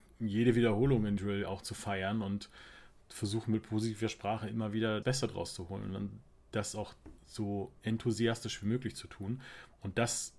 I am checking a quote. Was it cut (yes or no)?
yes